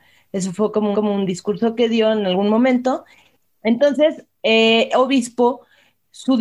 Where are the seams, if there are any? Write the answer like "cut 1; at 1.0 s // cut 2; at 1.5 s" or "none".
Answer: cut 1; at 0.9 s // cut 2; at 4.9 s